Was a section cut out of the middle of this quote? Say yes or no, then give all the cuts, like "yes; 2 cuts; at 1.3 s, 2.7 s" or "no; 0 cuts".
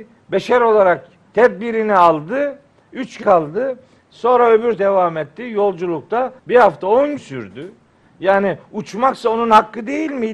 yes; 5 cuts; at 1.3 s, 3.2 s, 4.8 s, 6.4 s, 7.2 s